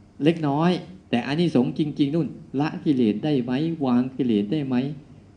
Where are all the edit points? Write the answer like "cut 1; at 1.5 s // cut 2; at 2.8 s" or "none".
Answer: cut 1; at 1.0 s

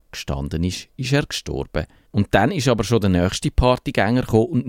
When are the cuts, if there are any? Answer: cut 1; at 2.1 s

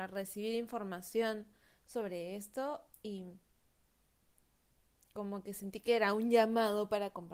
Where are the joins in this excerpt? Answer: none

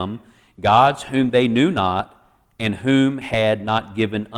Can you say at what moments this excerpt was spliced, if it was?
cut 1; at 3.2 s

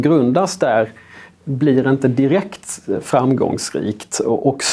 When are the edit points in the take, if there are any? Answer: none

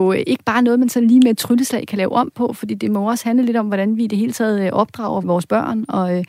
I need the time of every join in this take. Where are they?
cut 1; at 5.2 s

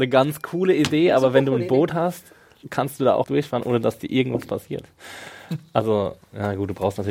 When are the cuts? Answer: cut 1; at 3.2 s

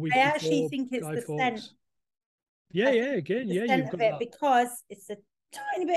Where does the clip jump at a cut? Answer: none

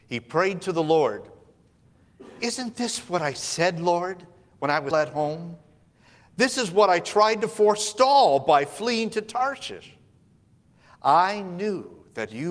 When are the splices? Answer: cut 1; at 4.9 s

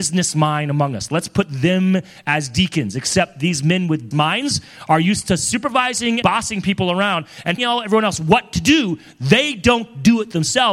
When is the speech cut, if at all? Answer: cut 1; at 4.1 s // cut 2; at 6.2 s // cut 3; at 7.6 s

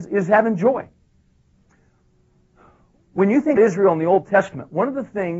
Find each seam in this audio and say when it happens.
cut 1; at 3.6 s

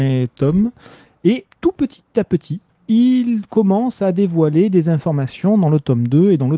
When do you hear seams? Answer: cut 1; at 1.5 s

